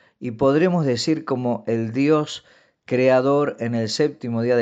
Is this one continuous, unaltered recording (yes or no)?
yes